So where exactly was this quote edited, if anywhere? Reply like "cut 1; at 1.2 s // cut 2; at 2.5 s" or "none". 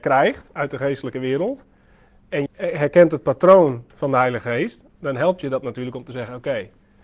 cut 1; at 2.5 s